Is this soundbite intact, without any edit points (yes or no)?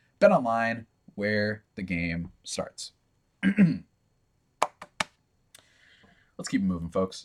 yes